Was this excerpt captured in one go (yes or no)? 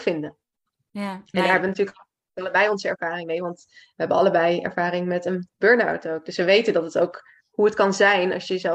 yes